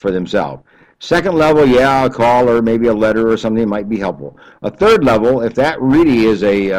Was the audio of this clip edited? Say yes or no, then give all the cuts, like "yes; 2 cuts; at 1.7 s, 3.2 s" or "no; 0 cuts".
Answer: no; 0 cuts